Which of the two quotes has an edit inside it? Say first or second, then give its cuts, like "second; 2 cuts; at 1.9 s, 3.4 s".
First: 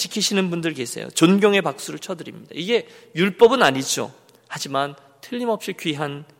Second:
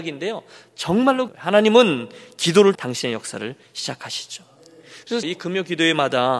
second; 3 cuts; at 1.3 s, 2.7 s, 5.2 s